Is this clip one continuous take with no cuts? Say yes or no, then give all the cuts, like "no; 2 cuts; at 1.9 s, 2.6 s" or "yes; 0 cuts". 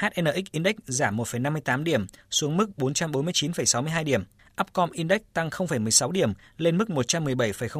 yes; 0 cuts